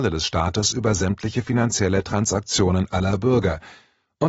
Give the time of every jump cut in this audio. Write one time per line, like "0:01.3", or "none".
none